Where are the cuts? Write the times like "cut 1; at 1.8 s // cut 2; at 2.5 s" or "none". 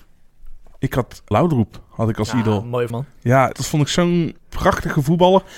cut 1; at 1.3 s // cut 2; at 2.9 s // cut 3; at 3.5 s // cut 4; at 4.4 s